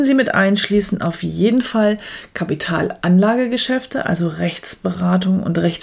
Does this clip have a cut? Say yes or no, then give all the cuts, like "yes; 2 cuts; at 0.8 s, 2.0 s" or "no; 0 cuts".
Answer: no; 0 cuts